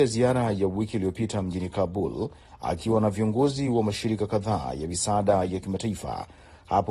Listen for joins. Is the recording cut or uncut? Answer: uncut